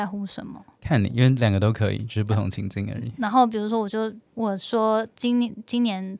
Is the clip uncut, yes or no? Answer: no